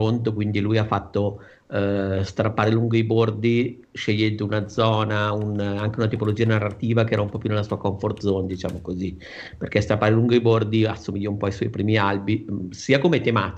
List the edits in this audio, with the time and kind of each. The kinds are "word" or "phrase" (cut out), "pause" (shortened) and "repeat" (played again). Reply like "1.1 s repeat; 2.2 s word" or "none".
none